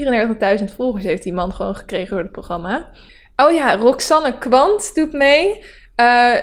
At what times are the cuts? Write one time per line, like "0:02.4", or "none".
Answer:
0:03.1